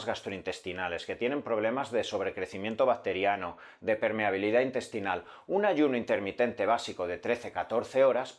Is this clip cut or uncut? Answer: uncut